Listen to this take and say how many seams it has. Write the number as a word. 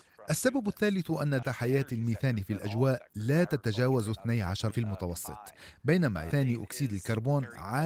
three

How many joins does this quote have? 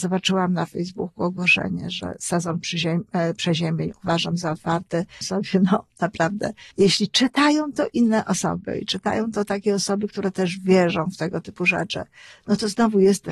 two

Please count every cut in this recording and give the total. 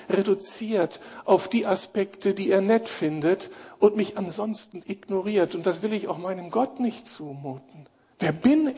zero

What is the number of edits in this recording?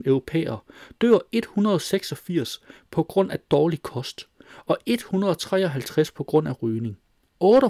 zero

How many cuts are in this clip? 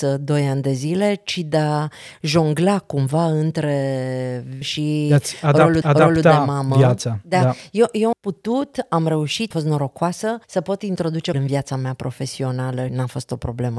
seven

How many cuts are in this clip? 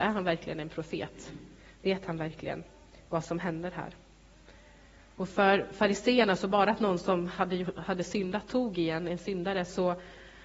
zero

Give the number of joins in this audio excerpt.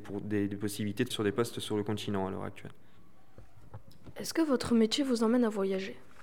one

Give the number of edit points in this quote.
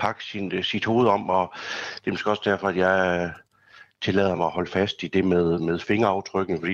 zero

